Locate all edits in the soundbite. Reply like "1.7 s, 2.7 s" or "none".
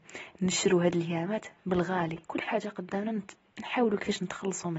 2.2 s